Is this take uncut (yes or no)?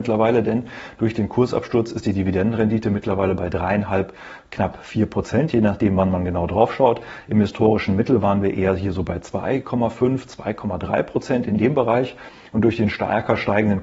yes